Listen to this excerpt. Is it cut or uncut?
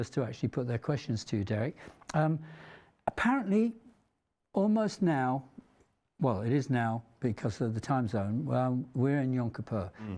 uncut